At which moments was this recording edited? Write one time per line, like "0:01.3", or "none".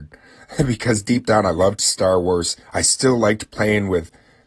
0:02.6